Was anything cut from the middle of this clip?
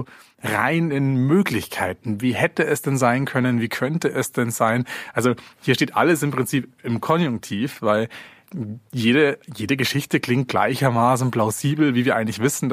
yes; 1 cut; at 10.5 s

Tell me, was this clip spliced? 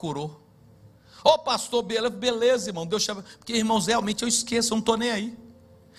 no; 0 cuts

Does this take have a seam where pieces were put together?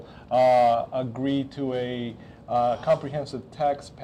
no; 0 cuts

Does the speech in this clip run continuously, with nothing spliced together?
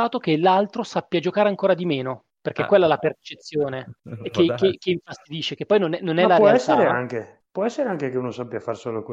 no; 1 cut; at 4.0 s

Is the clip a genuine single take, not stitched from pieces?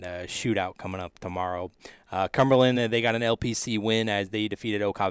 yes; 0 cuts

